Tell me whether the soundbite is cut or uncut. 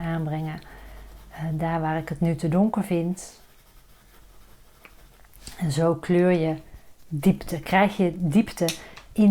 uncut